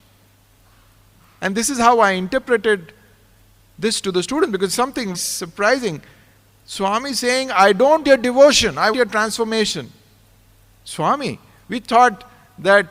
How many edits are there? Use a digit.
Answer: 3